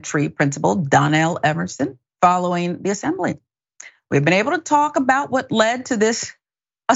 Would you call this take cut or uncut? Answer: uncut